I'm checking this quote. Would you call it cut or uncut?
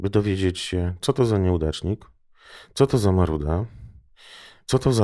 uncut